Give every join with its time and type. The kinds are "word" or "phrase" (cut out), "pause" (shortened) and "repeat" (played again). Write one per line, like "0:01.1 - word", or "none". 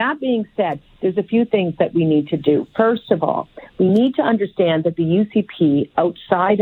none